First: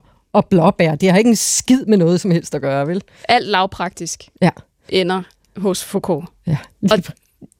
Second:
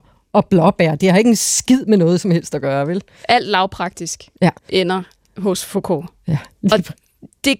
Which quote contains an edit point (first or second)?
second